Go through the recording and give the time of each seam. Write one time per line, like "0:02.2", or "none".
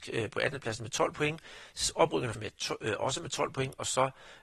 0:02.3